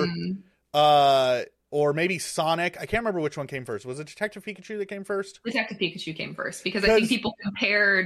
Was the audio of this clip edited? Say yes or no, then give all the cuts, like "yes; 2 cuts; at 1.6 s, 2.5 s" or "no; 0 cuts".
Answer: no; 0 cuts